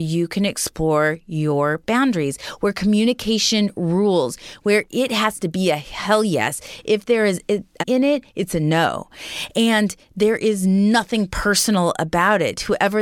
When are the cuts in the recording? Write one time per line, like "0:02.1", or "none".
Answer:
0:07.8